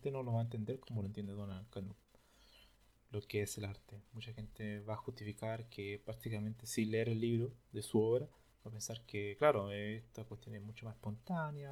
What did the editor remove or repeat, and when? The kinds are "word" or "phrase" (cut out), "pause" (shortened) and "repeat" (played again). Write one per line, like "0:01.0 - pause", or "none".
none